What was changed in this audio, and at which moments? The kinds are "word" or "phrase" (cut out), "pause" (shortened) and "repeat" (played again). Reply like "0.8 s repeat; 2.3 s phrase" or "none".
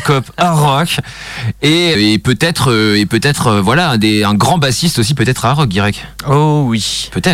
1.9 s word